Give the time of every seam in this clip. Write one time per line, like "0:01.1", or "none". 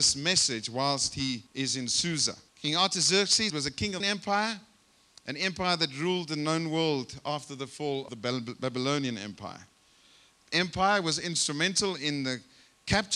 0:01.5
0:02.5
0:03.5
0:04.0
0:08.1
0:10.4